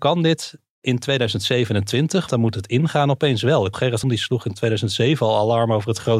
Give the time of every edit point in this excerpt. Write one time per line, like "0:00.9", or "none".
0:02.3
0:03.7
0:04.0